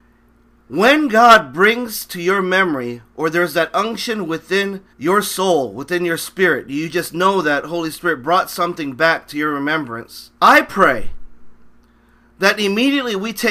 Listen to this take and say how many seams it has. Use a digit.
2